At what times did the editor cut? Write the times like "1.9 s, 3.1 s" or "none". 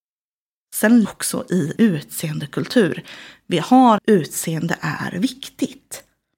1.0 s, 1.8 s, 4.0 s